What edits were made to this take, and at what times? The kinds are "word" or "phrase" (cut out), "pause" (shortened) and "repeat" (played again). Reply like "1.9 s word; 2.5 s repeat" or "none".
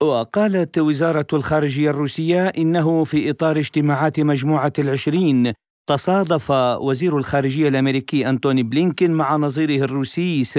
none